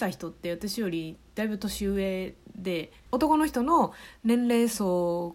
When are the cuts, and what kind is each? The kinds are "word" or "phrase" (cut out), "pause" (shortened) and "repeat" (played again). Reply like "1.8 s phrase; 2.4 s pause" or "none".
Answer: 3.0 s pause